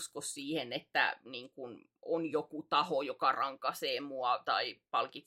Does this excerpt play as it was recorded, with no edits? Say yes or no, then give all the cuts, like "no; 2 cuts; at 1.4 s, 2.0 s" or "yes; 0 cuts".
yes; 0 cuts